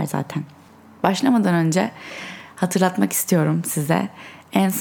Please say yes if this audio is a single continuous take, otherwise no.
yes